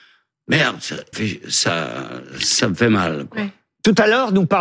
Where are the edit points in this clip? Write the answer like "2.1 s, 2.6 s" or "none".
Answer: 1.1 s